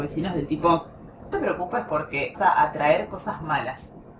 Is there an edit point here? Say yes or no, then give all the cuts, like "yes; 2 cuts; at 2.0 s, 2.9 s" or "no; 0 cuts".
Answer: yes; 2 cuts; at 1.3 s, 2.3 s